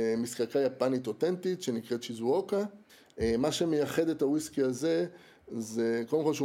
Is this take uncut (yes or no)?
yes